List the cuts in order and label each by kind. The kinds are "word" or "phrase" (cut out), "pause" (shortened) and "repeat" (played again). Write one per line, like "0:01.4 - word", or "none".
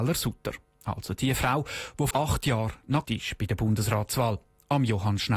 0:02.1 - word
0:03.0 - word